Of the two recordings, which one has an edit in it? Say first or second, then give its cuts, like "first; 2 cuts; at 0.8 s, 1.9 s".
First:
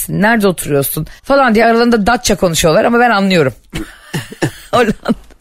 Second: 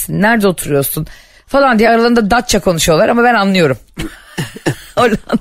first; 1 cut; at 1.2 s